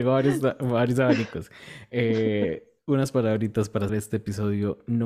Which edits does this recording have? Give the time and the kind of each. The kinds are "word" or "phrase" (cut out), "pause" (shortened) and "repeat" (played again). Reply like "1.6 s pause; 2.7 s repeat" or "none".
3.9 s word